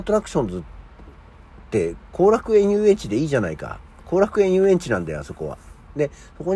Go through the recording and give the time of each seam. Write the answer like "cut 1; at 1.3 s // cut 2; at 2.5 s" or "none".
none